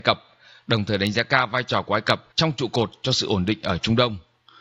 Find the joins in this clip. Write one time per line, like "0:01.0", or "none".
0:02.3